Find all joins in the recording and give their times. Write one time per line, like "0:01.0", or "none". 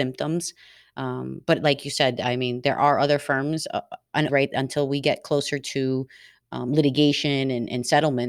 0:04.3